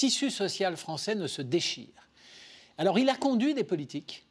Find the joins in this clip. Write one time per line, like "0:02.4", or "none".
none